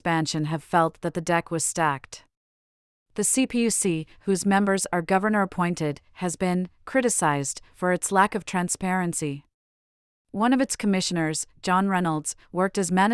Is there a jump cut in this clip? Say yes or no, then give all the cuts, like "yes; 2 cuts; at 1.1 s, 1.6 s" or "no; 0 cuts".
no; 0 cuts